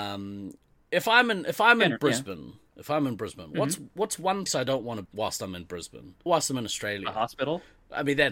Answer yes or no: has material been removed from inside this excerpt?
yes